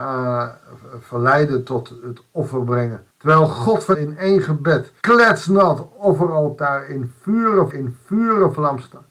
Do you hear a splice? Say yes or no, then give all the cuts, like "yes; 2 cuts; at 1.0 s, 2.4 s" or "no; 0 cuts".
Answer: yes; 4 cuts; at 3.1 s, 3.9 s, 5.0 s, 7.7 s